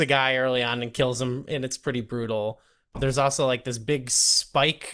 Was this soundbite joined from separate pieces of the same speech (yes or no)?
no